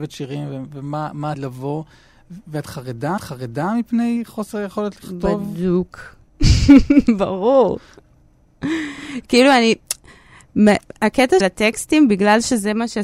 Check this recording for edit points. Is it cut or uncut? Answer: cut